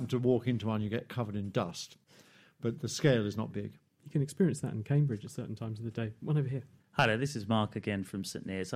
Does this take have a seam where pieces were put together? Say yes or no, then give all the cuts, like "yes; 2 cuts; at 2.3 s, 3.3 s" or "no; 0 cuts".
yes; 1 cut; at 3.5 s